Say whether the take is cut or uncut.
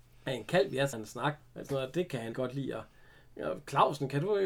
cut